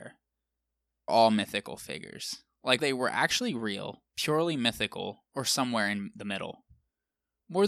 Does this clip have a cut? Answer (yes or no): yes